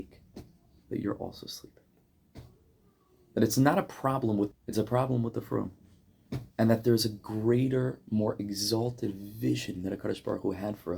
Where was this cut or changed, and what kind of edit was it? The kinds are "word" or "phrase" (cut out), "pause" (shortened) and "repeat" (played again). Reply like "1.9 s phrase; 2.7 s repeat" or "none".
4.5 s phrase; 6.5 s pause